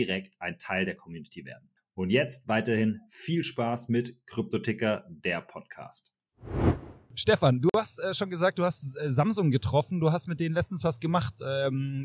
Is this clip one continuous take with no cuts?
no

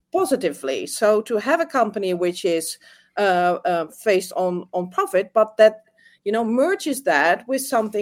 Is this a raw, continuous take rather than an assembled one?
yes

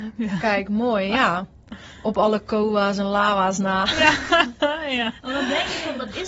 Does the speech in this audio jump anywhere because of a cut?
no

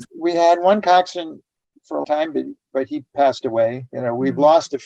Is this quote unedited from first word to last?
no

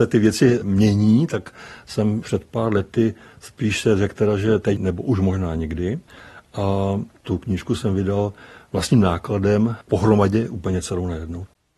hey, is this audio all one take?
yes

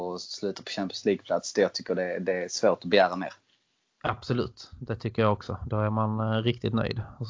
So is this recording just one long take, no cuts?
yes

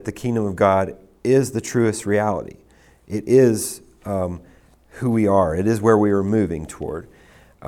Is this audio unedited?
yes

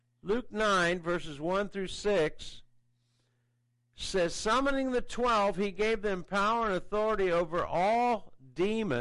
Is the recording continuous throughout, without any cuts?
yes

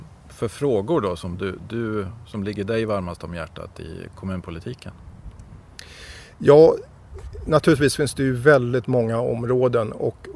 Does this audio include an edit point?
no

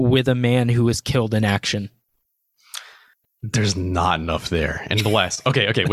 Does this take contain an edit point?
no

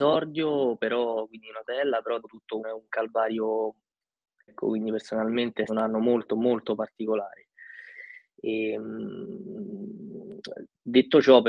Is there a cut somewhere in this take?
yes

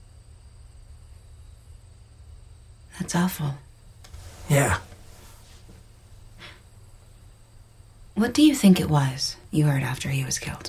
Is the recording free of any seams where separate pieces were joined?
yes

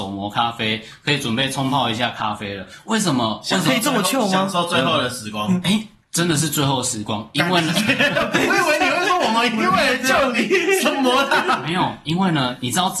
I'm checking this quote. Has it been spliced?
no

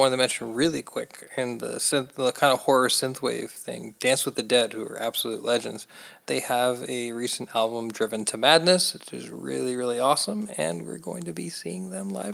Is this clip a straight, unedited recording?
yes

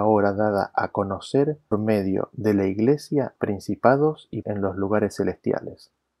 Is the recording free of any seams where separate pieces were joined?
no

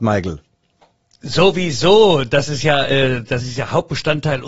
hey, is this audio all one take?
yes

